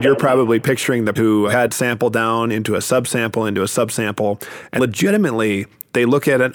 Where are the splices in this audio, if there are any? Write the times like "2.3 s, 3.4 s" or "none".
1.2 s, 1.7 s, 4.8 s